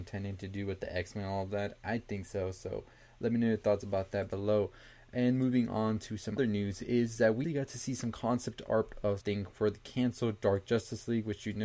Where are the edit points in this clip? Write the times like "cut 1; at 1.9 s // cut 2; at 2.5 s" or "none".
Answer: cut 1; at 6.4 s // cut 2; at 7.4 s // cut 3; at 9.2 s